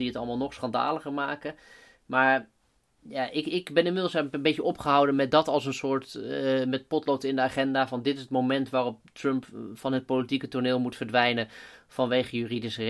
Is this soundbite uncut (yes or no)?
yes